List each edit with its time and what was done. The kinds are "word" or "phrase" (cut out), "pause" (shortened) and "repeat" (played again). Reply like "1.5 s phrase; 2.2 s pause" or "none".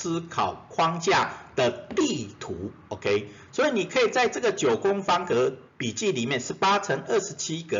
5.7 s pause